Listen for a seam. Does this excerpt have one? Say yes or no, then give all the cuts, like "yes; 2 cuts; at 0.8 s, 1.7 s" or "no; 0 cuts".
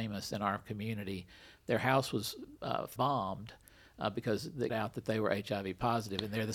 yes; 2 cuts; at 3.0 s, 4.7 s